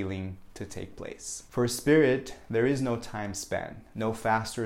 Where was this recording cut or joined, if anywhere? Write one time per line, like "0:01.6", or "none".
none